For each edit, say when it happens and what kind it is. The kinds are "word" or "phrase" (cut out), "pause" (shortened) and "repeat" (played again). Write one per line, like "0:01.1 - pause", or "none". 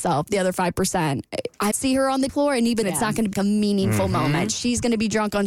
0:01.7 - word
0:02.3 - word
0:02.8 - word
0:03.3 - word